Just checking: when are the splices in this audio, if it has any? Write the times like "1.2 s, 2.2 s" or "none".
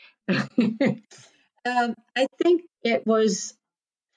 none